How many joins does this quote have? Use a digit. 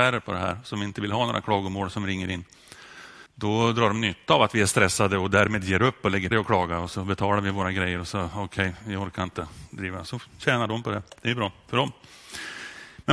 2